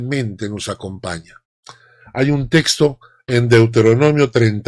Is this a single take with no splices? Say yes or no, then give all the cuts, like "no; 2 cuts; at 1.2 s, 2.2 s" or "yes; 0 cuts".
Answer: yes; 0 cuts